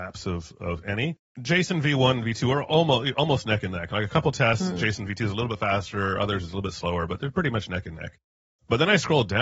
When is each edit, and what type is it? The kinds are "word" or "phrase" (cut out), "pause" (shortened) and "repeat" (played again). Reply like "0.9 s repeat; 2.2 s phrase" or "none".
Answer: none